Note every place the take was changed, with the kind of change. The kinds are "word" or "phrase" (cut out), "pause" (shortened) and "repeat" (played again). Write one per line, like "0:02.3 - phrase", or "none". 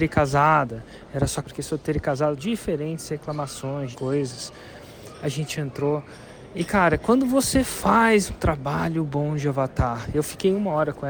0:01.4 - word
0:02.4 - word
0:03.9 - word
0:08.3 - word